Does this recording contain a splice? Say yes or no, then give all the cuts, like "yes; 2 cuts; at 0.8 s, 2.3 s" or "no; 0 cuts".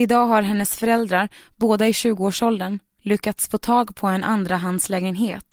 no; 0 cuts